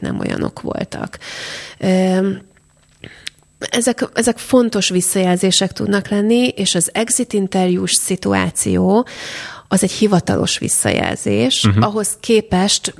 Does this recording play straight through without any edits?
yes; 0 cuts

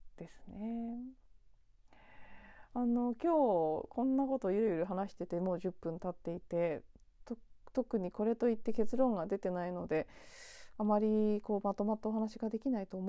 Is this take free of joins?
yes; 0 cuts

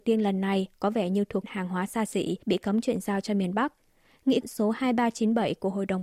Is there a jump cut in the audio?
yes; 3 cuts; at 1.4 s, 2.4 s, 4.4 s

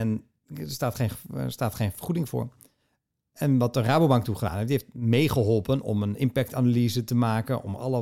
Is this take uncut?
yes; 0 cuts

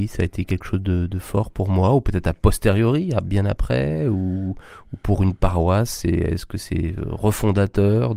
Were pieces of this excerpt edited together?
no; 0 cuts

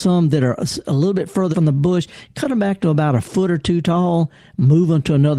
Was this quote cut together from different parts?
yes; 1 cut; at 1.5 s

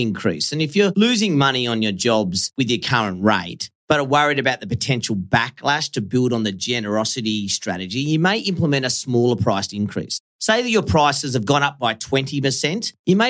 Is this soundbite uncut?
yes; 0 cuts

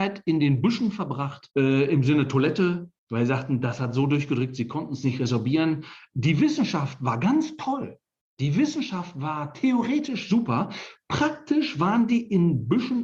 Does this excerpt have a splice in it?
yes; 2 cuts; at 1.5 s, 3.0 s

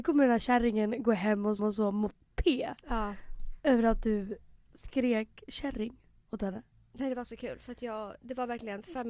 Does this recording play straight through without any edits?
no; 2 cuts; at 1.6 s, 3.6 s

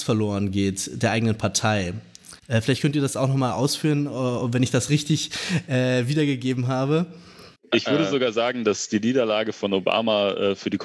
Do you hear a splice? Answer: yes; 2 cuts; at 2.4 s, 7.6 s

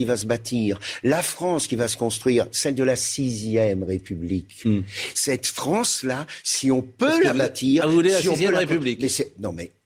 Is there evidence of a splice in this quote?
no; 0 cuts

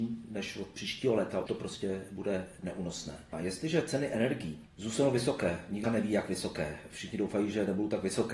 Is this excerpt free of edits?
no; 2 cuts; at 1.5 s, 5.8 s

